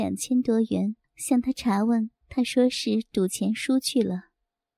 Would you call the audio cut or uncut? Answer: cut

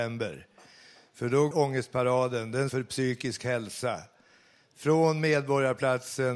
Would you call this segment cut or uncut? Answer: cut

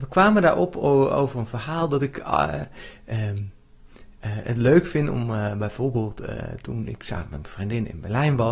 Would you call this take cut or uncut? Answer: uncut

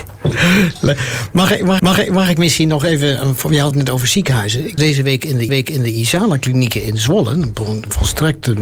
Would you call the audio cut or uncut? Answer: cut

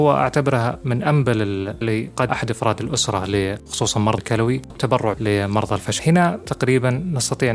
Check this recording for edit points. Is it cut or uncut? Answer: cut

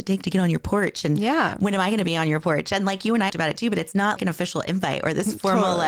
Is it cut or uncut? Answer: cut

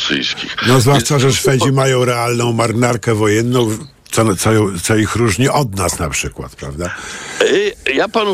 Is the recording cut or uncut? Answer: uncut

